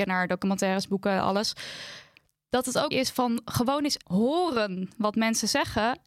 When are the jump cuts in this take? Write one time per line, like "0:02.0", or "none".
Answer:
0:02.9
0:04.0